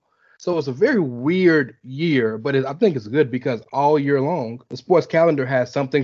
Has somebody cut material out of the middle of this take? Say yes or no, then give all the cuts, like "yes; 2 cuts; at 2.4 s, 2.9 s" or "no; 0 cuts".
yes; 1 cut; at 4.7 s